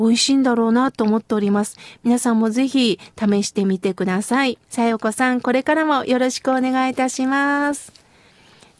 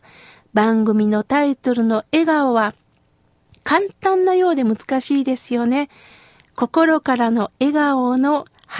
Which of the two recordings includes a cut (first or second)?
first